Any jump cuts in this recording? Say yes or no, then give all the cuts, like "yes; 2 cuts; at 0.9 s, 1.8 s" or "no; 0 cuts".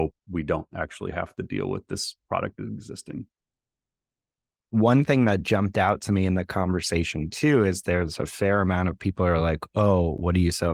no; 0 cuts